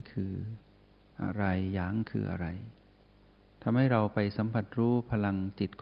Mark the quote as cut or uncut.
uncut